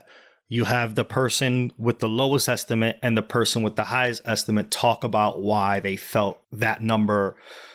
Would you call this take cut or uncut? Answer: cut